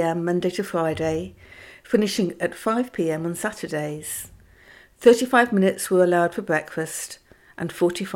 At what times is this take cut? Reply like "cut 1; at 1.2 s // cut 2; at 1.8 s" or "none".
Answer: cut 1; at 2.4 s